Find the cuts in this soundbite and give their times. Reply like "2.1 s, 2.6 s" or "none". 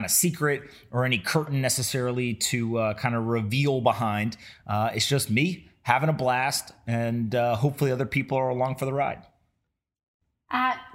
none